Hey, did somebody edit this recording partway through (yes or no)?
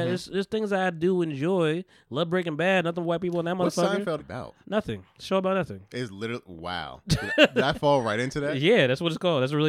yes